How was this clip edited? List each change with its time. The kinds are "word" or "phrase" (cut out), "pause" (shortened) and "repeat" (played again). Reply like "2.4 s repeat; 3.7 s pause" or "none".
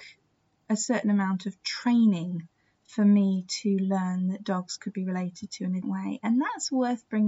5.8 s word